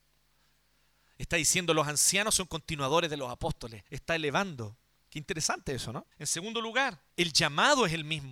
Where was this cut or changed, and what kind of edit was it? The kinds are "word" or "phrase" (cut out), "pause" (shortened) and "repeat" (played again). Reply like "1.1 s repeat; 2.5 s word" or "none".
3.9 s pause; 5.0 s pause; 6.1 s pause; 7.1 s pause

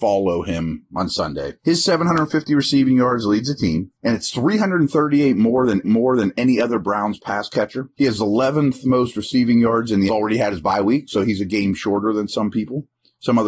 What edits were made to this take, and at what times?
1.6 s pause; 4.0 s pause; 5.8 s repeat; 7.9 s pause; 10.1 s phrase

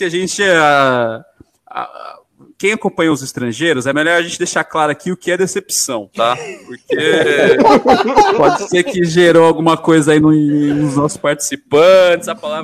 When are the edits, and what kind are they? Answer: none

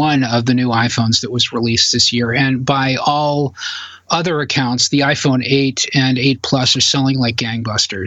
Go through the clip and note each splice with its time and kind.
none

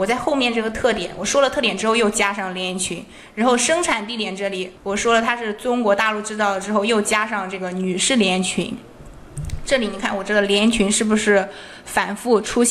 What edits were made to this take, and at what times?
4.8 s pause

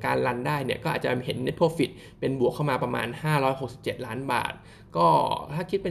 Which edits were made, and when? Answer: none

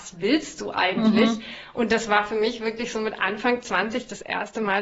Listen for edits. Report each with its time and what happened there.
none

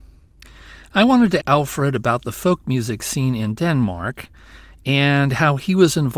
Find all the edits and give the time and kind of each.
1.4 s word

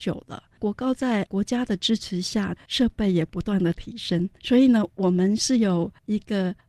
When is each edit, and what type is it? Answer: 4.4 s pause

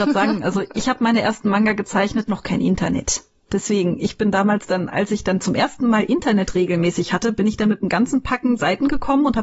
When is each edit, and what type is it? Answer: 2.3 s phrase

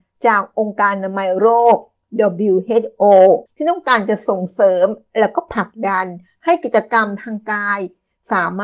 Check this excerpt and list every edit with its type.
3.5 s pause

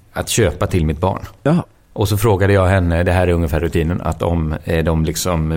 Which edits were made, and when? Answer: 1.7 s pause

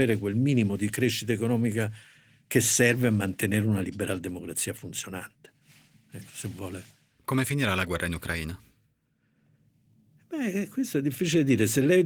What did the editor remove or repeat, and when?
none

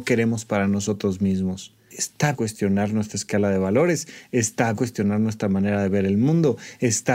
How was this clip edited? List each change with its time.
2.3 s word; 4.7 s word

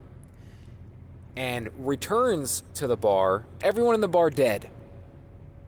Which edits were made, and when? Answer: 3.6 s word

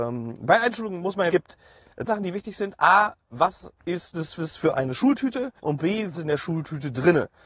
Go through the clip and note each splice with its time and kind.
1.3 s phrase; 2.1 s word; 3.8 s pause; 4.3 s repeat; 5.6 s pause; 6.1 s phrase

